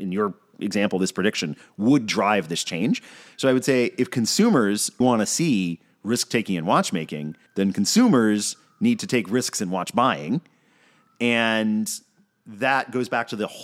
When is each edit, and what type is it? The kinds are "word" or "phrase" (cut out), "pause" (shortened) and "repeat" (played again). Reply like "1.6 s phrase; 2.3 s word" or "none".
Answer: 5.0 s word; 7.5 s pause